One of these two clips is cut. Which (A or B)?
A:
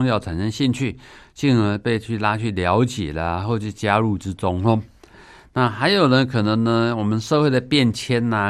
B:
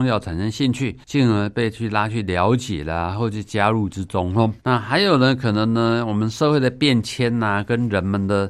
B